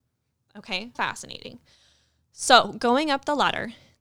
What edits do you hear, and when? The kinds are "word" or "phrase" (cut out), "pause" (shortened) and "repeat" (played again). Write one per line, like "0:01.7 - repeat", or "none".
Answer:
0:00.9 - word